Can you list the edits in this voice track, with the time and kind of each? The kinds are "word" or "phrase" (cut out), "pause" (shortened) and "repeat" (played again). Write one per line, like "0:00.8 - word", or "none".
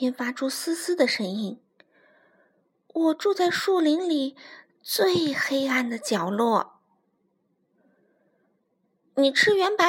none

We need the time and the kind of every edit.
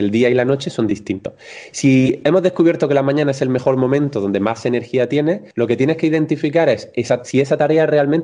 0:05.5 - pause

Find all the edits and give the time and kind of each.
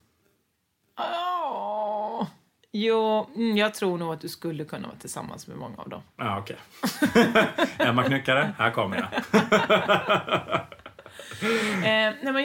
none

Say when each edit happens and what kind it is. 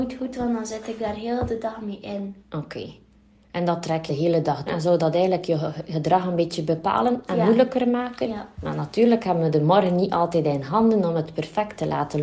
0:02.4 - pause
0:04.1 - word
0:04.7 - word
0:08.5 - pause

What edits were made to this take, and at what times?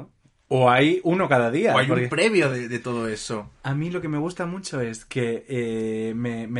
none

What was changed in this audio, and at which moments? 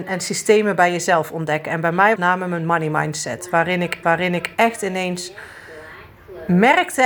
0:02.2 - phrase
0:04.0 - repeat

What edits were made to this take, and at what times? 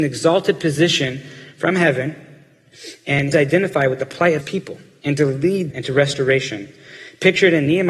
0:03.3 - phrase
0:04.4 - word
0:05.7 - word

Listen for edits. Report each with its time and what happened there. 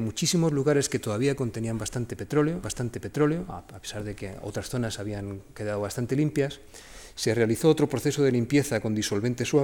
0:02.6 - repeat

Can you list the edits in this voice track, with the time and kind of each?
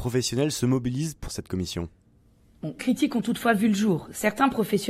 0:01.3 - phrase
0:02.8 - word

